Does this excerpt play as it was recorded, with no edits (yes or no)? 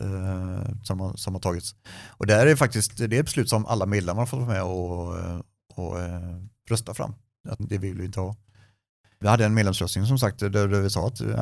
no